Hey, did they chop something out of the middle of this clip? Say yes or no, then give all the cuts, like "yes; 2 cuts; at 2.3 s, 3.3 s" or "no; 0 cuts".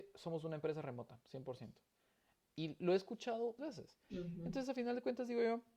yes; 1 cut; at 3.6 s